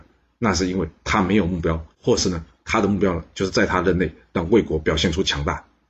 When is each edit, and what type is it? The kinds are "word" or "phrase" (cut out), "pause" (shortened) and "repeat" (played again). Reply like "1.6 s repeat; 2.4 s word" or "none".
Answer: 1.9 s pause

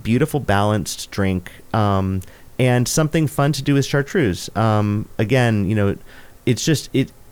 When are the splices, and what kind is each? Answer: none

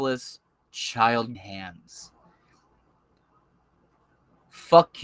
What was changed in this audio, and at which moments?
1.3 s word

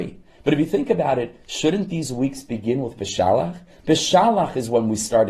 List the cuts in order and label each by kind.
none

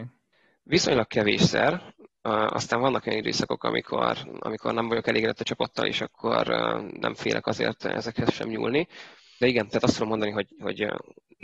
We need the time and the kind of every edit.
none

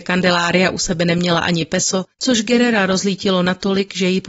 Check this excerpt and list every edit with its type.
2.1 s pause

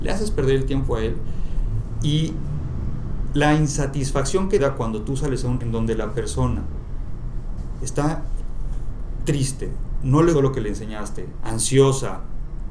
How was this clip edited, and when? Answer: 4.6 s word; 5.6 s word; 10.3 s word; 11.4 s word

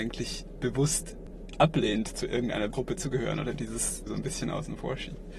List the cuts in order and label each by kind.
2.7 s word; 4.1 s word

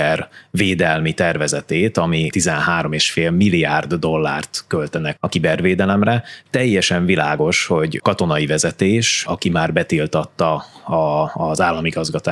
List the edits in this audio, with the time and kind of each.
2.3 s word; 5.2 s word; 8.0 s phrase

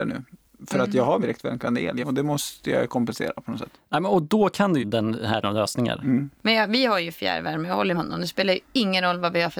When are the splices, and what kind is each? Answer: 1.2 s word; 2.0 s phrase; 4.8 s phrase; 5.4 s word; 7.9 s word

